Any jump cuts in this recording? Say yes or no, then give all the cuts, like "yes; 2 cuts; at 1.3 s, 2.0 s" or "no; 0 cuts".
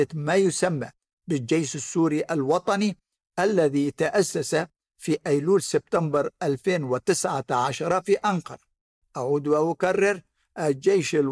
no; 0 cuts